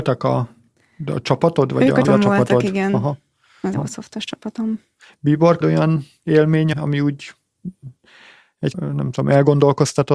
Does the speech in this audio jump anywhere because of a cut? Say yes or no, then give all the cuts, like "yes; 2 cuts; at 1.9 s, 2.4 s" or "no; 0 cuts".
yes; 5 cuts; at 2.0 s, 3.7 s, 5.6 s, 6.7 s, 8.7 s